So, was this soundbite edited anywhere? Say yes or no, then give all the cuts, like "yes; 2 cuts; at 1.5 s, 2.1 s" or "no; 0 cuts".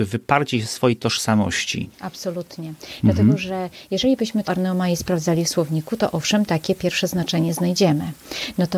yes; 2 cuts; at 1.9 s, 4.5 s